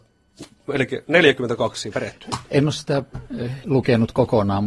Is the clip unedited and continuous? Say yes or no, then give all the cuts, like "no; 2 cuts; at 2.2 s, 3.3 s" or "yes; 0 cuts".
no; 2 cuts; at 1.9 s, 3.6 s